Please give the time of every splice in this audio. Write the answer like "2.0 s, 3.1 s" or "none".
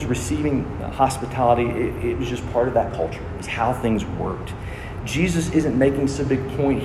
none